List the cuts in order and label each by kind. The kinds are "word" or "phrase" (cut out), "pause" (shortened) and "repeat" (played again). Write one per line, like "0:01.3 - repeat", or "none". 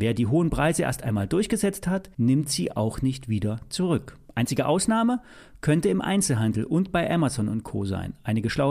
0:02.1 - pause